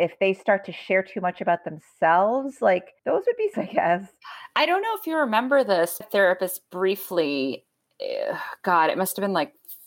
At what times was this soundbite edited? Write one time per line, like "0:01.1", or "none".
0:03.0
0:03.5
0:06.0